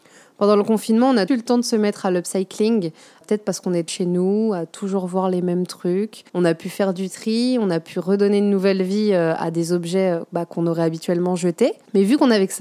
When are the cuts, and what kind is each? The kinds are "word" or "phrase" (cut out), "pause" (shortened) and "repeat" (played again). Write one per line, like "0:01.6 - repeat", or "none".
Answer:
0:01.3 - word
0:03.2 - word
0:03.9 - word
0:06.3 - pause